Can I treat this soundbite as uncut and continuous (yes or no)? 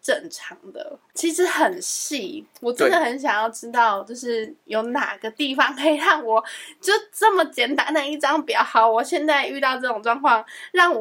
no